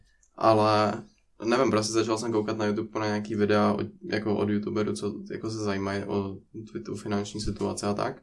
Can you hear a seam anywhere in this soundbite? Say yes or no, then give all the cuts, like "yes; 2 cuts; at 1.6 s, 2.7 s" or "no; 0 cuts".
no; 0 cuts